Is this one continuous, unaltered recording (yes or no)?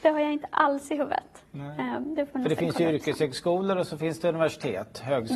yes